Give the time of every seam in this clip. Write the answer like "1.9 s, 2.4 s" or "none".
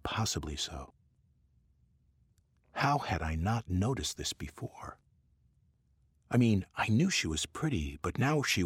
none